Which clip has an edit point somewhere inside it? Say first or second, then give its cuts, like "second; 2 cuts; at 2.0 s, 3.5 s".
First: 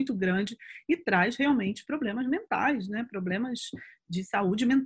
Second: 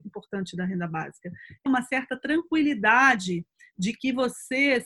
second; 1 cut; at 1.7 s